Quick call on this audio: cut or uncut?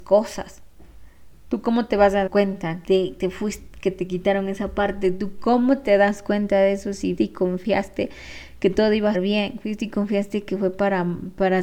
cut